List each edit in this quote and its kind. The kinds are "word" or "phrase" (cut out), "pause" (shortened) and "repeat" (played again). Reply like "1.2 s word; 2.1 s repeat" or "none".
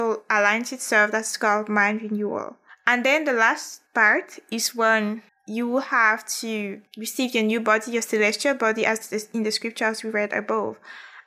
2.7 s pause; 3.9 s pause; 5.3 s pause; 6.9 s pause